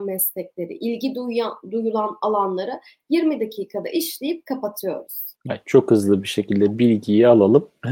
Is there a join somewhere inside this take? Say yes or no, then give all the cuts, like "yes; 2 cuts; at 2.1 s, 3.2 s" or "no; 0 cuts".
yes; 1 cut; at 5.4 s